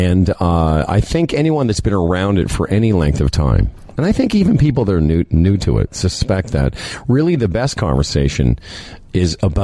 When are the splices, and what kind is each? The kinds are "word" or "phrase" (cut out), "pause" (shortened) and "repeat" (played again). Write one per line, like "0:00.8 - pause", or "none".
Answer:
none